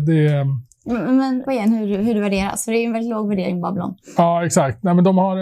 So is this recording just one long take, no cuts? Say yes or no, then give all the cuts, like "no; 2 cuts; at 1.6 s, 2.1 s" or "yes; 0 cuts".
no; 1 cut; at 1.4 s